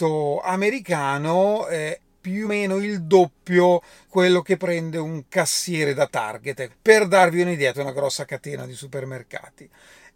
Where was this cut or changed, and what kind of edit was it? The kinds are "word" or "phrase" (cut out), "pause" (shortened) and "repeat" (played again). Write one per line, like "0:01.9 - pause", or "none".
0:02.0 - word
0:02.4 - word
0:04.1 - word
0:06.7 - word
0:07.7 - word

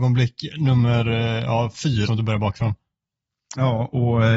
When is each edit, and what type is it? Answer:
0:02.1 - word

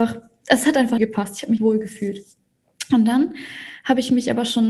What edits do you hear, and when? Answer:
0:01.0 - phrase
0:01.6 - word

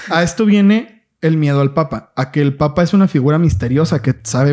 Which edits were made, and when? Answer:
none

